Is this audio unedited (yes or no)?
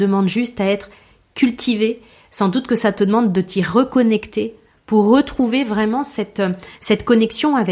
yes